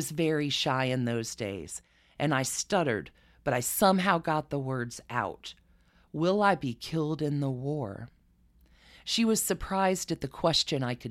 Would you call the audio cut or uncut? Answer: uncut